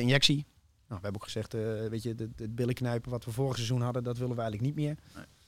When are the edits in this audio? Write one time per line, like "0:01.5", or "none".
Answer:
none